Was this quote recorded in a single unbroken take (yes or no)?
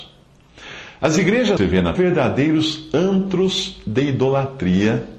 no